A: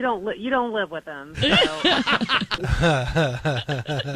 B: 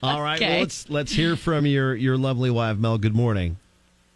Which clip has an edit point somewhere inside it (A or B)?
A